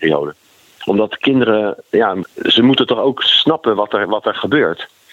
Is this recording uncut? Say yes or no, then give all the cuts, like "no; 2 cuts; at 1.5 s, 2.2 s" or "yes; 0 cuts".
no; 1 cut; at 2.2 s